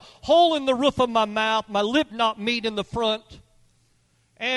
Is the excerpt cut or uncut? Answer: cut